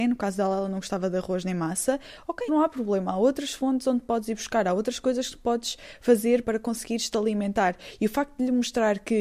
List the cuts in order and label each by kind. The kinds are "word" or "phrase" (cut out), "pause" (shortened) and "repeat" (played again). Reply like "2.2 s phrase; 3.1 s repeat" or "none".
2.5 s word; 6.4 s word